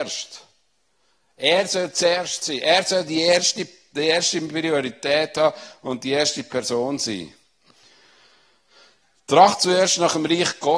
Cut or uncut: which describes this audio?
uncut